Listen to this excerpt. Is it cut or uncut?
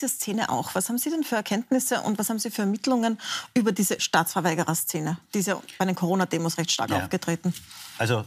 cut